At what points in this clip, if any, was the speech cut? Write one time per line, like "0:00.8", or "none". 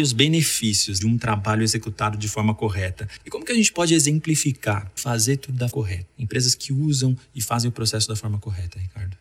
0:01.0
0:05.0
0:05.7
0:06.1